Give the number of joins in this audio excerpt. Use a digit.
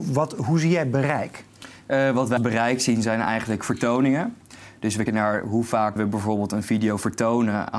3